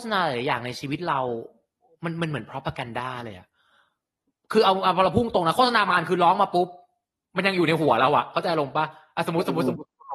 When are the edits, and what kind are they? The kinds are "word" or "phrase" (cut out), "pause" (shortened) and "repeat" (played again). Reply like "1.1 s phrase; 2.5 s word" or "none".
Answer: none